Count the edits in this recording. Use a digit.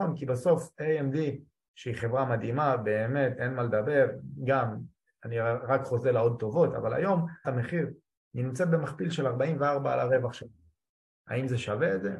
1